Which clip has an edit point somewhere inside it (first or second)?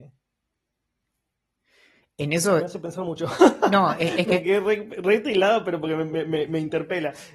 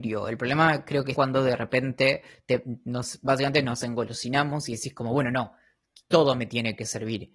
second